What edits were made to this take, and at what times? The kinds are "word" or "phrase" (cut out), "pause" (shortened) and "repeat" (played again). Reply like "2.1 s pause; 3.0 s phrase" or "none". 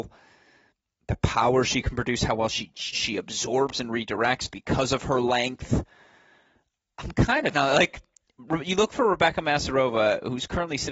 2.9 s word; 7.5 s word